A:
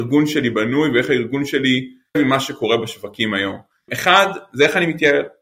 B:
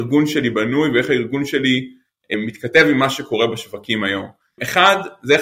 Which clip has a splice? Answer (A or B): A